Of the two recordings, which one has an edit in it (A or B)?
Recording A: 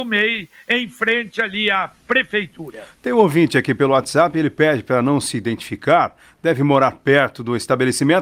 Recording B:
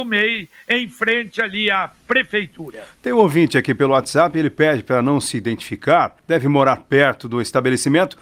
B